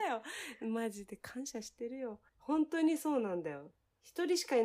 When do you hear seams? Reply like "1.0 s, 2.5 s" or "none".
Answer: 2.3 s